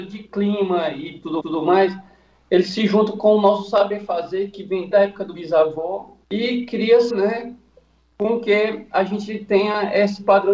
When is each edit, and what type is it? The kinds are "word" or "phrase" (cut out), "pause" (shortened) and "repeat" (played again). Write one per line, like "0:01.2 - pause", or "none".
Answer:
0:01.4 - repeat
0:04.9 - word
0:05.3 - word
0:06.2 - pause
0:07.1 - phrase